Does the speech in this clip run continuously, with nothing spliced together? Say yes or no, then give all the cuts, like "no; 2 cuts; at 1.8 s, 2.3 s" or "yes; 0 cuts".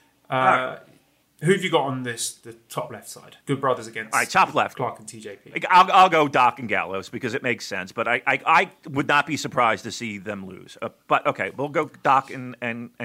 no; 2 cuts; at 1.2 s, 3.4 s